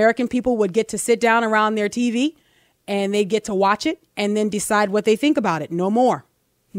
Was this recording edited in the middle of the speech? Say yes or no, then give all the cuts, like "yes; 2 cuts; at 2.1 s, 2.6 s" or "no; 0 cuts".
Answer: no; 0 cuts